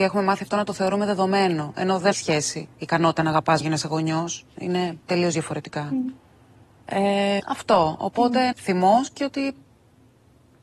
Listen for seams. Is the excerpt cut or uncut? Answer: cut